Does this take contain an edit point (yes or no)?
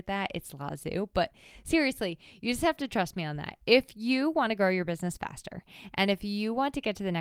no